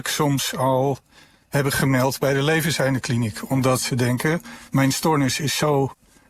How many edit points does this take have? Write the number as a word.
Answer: one